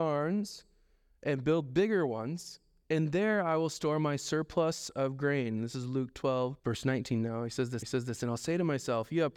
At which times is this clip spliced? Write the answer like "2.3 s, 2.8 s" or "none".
6.6 s, 7.8 s